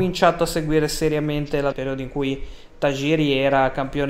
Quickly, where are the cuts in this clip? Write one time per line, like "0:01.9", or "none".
0:01.7